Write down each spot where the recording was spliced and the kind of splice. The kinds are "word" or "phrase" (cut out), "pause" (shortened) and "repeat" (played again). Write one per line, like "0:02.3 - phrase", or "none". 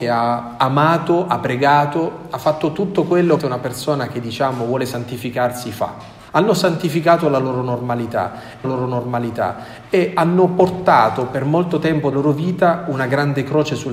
0:03.4 - phrase
0:06.3 - pause
0:08.6 - repeat
0:12.1 - word